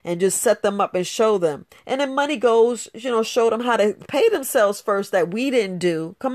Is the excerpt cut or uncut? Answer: uncut